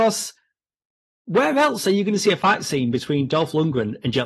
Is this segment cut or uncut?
uncut